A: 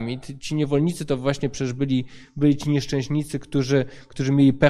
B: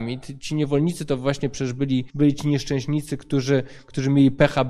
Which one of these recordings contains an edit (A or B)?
B